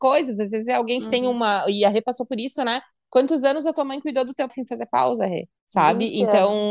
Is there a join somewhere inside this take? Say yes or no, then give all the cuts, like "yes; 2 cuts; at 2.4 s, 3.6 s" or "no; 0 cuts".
yes; 2 cuts; at 4.5 s, 5.6 s